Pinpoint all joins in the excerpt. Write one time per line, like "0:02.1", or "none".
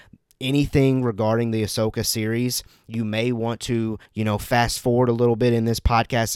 0:04.0

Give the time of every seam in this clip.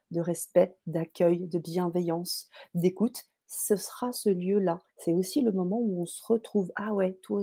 0:04.9

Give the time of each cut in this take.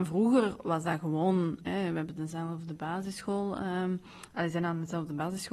none

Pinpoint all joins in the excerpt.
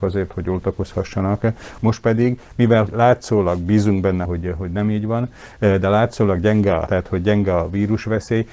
0:02.9
0:04.3
0:06.9

